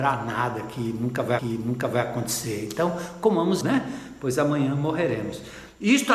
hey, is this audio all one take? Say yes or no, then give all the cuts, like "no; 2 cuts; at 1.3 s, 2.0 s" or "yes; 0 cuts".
no; 2 cuts; at 1.4 s, 3.6 s